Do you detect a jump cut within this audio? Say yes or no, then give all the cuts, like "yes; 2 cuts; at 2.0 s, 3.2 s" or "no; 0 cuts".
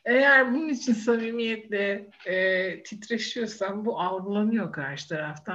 no; 0 cuts